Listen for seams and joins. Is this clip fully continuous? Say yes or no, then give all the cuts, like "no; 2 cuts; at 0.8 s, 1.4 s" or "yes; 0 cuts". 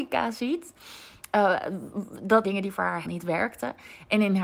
no; 2 cuts; at 2.4 s, 3.0 s